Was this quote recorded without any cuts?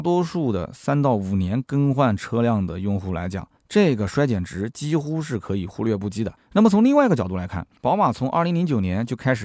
no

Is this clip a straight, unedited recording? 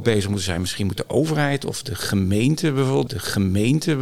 no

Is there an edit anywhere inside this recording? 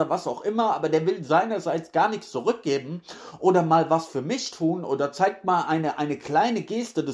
no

